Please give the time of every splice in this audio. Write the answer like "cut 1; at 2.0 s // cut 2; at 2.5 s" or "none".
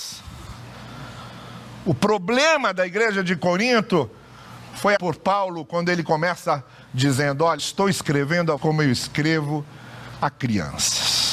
cut 1; at 5.0 s // cut 2; at 7.6 s // cut 3; at 8.6 s